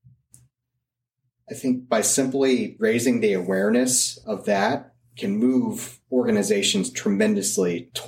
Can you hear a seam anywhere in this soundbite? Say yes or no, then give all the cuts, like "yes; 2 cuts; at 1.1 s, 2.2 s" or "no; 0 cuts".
no; 0 cuts